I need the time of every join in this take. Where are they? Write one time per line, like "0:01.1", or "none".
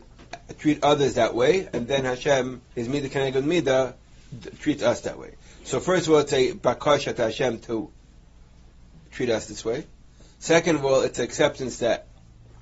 0:02.7